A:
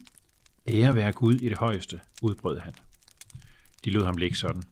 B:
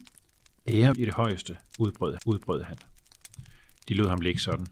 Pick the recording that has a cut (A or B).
B